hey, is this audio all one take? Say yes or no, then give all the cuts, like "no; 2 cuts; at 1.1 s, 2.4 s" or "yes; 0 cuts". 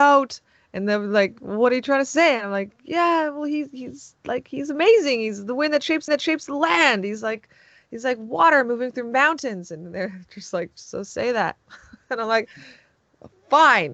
no; 1 cut; at 6.1 s